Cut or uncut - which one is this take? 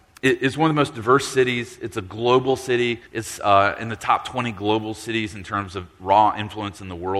cut